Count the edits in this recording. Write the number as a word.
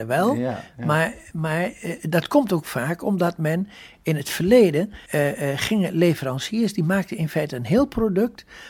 one